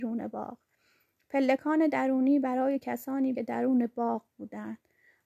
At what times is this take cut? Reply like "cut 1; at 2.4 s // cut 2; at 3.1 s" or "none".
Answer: cut 1; at 3.3 s